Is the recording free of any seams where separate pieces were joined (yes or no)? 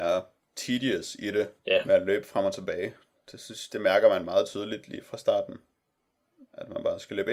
no